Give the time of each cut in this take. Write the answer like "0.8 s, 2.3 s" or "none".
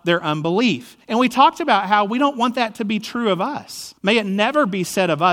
1.0 s, 4.0 s

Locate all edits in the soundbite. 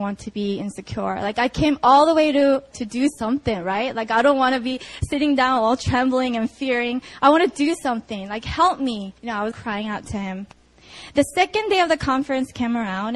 2.7 s, 9.2 s, 9.5 s

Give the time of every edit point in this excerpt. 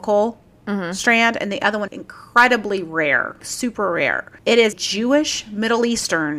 1.9 s, 3.4 s, 4.4 s, 4.7 s

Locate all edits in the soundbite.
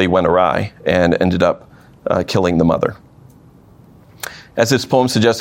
none

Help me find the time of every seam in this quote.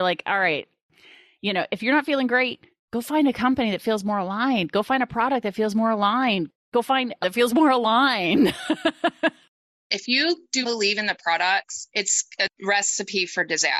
7.2 s, 10.6 s

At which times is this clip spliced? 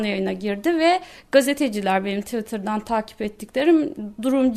none

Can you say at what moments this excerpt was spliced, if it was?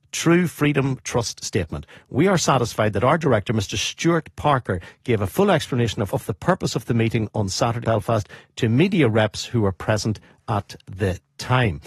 6.1 s, 7.8 s

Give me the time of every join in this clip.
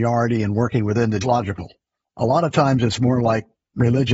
1.2 s

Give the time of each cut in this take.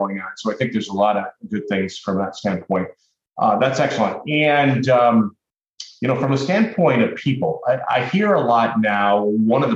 none

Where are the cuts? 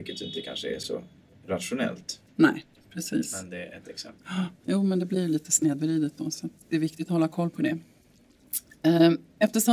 none

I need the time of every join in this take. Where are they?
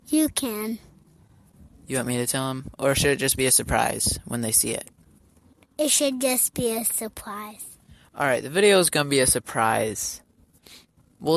none

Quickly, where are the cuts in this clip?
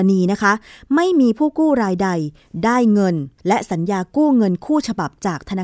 3.4 s

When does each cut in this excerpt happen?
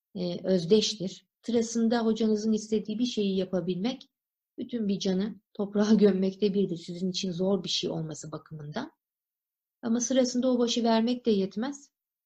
1.4 s, 5.5 s

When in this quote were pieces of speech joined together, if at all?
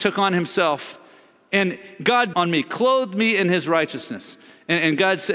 2.3 s

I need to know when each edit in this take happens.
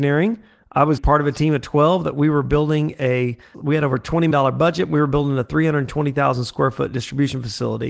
1.0 s, 3.5 s, 4.3 s

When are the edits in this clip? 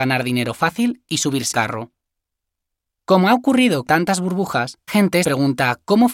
1.5 s, 3.9 s, 4.9 s, 5.2 s

